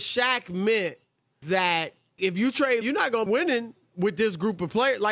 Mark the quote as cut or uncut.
cut